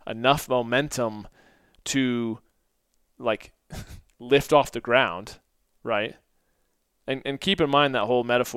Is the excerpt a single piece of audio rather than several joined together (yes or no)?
yes